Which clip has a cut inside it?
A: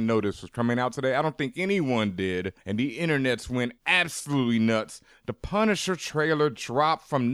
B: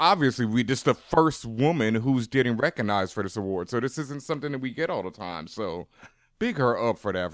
A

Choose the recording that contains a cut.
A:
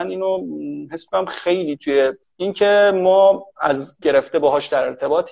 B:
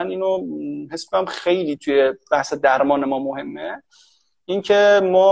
A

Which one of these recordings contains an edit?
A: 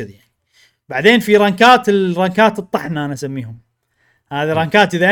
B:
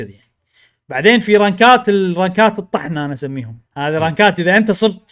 B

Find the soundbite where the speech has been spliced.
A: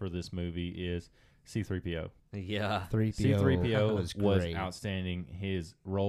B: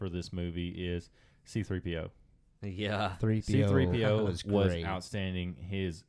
A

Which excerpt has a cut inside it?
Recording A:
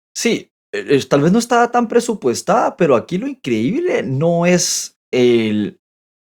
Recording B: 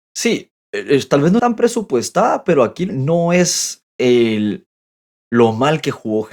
B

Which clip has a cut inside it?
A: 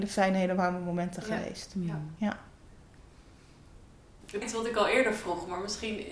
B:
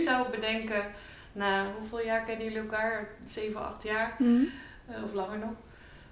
A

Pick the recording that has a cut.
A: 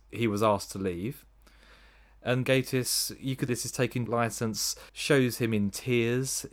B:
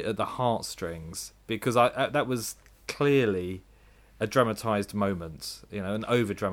A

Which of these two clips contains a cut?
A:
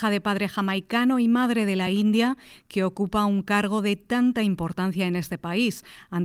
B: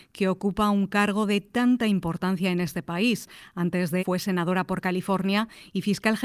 B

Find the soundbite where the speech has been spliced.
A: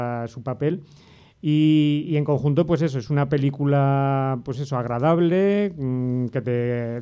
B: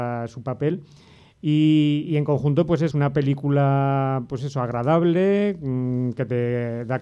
B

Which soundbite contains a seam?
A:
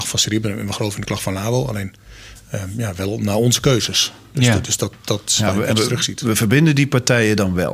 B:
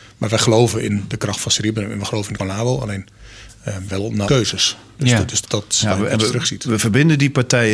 B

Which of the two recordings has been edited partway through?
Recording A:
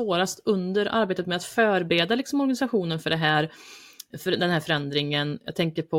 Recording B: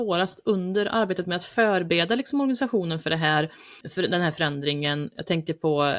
B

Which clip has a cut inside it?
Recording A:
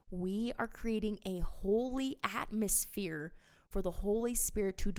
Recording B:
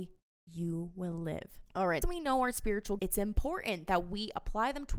B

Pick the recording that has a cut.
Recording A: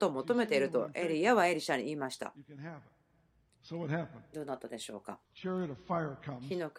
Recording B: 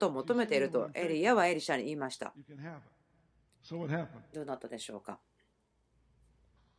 A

